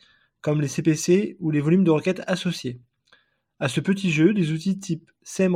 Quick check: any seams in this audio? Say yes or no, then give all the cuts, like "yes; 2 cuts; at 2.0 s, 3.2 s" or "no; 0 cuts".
no; 0 cuts